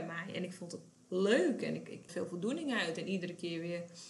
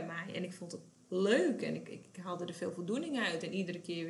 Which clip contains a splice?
first; 1 cut; at 2.1 s

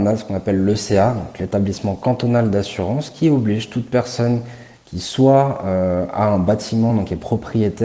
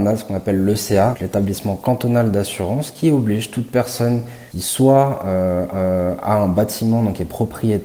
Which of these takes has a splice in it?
second; 3 cuts; at 1.1 s, 4.5 s, 5.7 s

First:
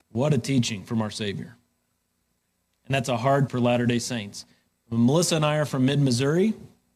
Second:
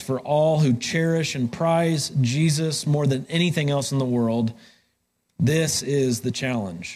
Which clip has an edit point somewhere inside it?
first; 1 cut; at 3.5 s

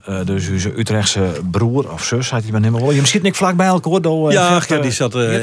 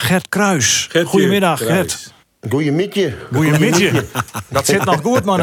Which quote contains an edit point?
second; 1 cut; at 2.2 s

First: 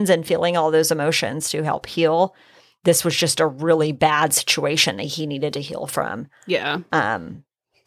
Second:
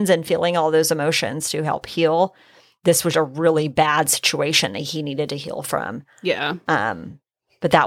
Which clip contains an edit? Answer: second; 1 cut; at 3.1 s

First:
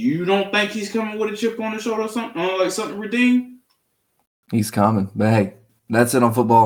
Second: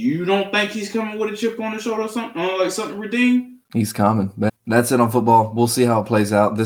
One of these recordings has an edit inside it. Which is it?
second; 2 cuts; at 3.6 s, 4.5 s

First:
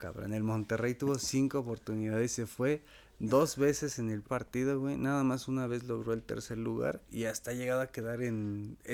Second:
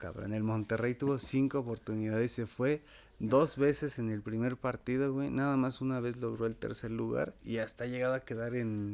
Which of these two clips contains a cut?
first; 1 cut; at 4.2 s

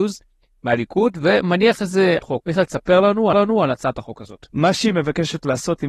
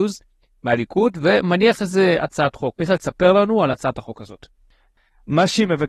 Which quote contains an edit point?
first; 3 cuts; at 2.2 s, 3.3 s, 4.5 s

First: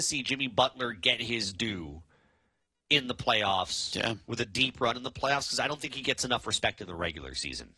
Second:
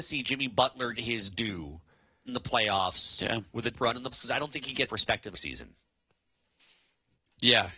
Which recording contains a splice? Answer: second; 6 cuts; at 1.0 s, 2.3 s, 3.7 s, 4.1 s, 4.9 s, 5.3 s

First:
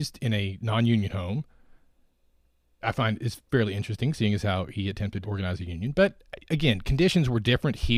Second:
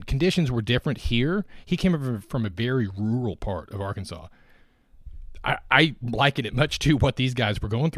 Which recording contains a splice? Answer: first; 2 cuts; at 2.8 s, 5.2 s

